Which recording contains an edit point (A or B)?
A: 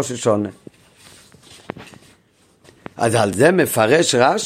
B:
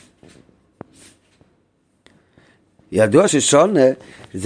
B